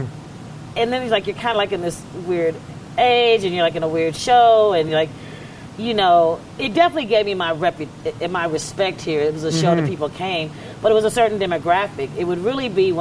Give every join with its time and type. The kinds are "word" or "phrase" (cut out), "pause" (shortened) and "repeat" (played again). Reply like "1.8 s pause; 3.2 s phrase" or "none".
none